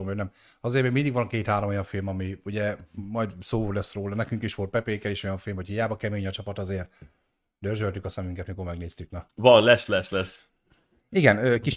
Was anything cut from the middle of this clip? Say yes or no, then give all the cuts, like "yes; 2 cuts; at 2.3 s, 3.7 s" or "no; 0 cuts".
no; 0 cuts